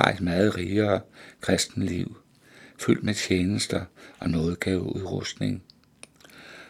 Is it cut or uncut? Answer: uncut